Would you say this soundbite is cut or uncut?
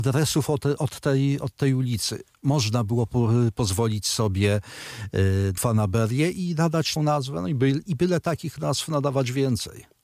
cut